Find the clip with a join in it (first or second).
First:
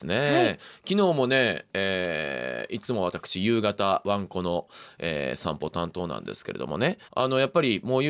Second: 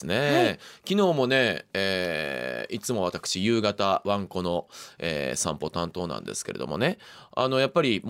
first